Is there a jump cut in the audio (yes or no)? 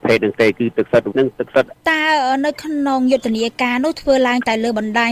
yes